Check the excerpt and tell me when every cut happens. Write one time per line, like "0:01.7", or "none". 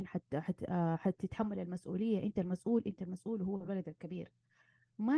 none